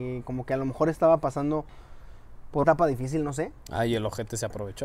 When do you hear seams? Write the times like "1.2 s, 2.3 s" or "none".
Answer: 2.6 s

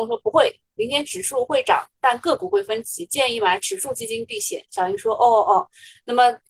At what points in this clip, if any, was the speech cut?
none

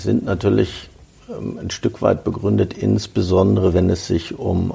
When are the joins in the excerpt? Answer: none

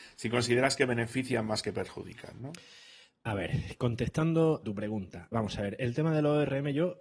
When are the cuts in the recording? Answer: 4.6 s, 5.3 s

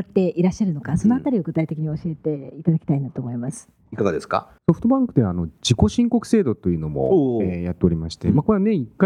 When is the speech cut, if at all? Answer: 4.6 s

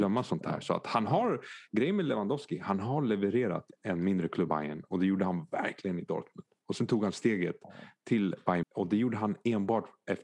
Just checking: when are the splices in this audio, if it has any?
3.7 s, 4.5 s, 8.6 s

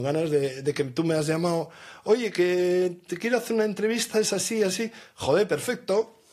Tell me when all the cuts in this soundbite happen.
none

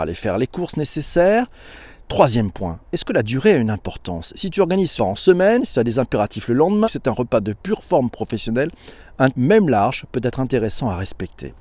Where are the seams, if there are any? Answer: 2.8 s, 5.0 s, 6.8 s, 9.3 s

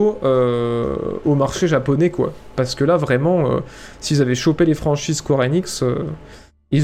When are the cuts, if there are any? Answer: none

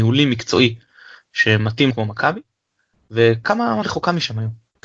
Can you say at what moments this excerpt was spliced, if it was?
1.9 s, 3.8 s

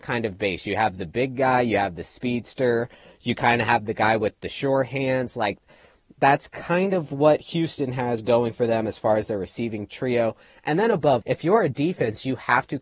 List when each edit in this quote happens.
11.2 s

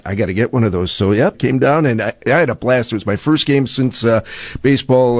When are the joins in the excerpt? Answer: 1.3 s

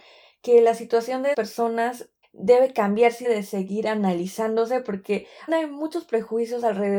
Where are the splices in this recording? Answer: 1.3 s, 2.2 s, 3.2 s, 5.5 s

